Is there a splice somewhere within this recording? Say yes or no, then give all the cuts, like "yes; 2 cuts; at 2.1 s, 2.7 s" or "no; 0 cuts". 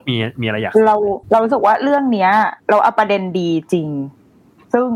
yes; 2 cuts; at 1.2 s, 2.6 s